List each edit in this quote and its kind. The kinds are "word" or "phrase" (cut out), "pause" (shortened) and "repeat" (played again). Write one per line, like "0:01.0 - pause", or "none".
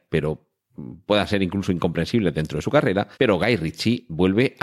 0:03.1 - pause